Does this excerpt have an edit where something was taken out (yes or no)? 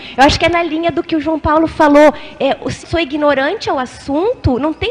yes